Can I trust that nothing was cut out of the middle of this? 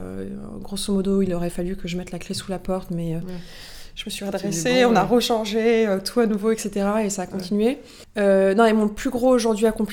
yes; 0 cuts

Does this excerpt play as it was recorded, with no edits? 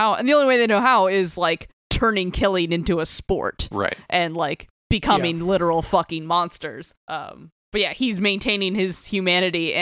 no; 1 cut; at 7.0 s

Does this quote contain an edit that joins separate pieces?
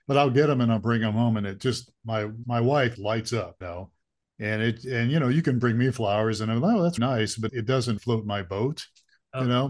yes; 6 cuts; at 2.4 s, 2.9 s, 3.6 s, 7.0 s, 7.5 s, 8.0 s

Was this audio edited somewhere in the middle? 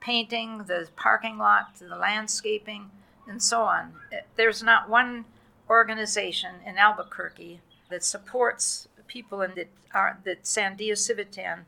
yes; 2 cuts; at 7.9 s, 9.5 s

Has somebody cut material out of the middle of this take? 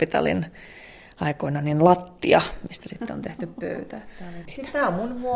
no; 0 cuts

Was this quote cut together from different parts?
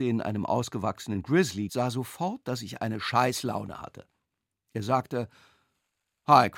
yes; 1 cut; at 1.7 s

